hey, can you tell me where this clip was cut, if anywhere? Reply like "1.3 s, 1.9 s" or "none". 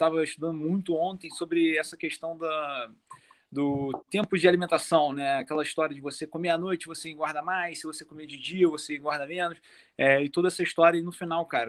none